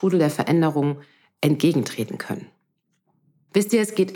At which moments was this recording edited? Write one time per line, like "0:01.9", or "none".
none